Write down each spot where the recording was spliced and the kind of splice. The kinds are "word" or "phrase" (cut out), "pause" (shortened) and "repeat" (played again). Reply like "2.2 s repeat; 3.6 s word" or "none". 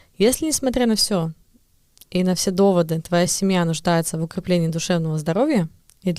none